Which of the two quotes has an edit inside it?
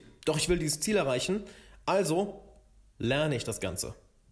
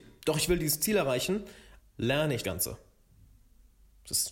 second; 2 cuts; at 1.8 s, 2.4 s

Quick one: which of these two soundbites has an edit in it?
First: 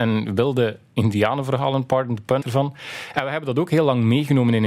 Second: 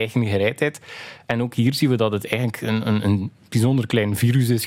first; 1 cut; at 2.4 s

